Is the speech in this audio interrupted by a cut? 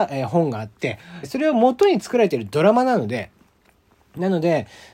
yes; 1 cut; at 1.2 s

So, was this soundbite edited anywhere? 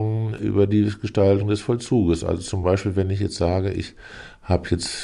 no; 0 cuts

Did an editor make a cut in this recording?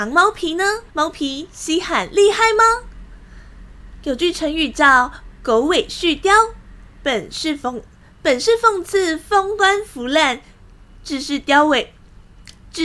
yes; 1 cut; at 0.9 s

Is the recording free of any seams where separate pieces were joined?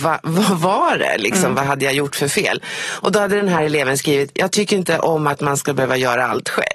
yes; 0 cuts

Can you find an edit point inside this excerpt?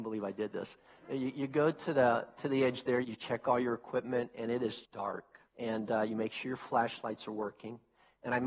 yes; 3 cuts; at 3.0 s, 4.8 s, 5.5 s

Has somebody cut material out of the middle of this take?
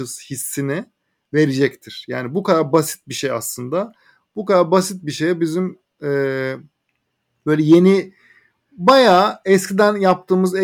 no; 0 cuts

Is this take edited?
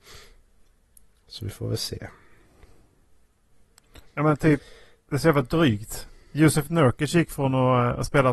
no; 0 cuts

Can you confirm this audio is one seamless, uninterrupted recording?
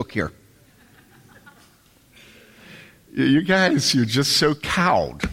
yes; 0 cuts

